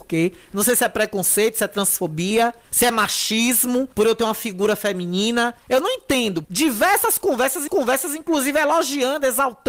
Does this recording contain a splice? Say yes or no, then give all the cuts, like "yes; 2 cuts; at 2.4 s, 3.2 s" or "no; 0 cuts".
yes; 5 cuts; at 2.6 s, 3.9 s, 5.6 s, 6.4 s, 7.7 s